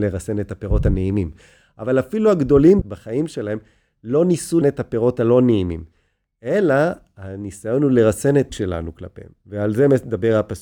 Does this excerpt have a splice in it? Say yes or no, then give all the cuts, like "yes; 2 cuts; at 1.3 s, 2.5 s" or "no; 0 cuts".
yes; 3 cuts; at 2.8 s, 4.6 s, 8.5 s